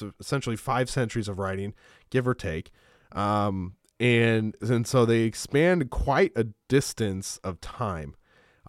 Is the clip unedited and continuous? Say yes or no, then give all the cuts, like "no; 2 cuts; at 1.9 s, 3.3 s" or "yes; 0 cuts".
yes; 0 cuts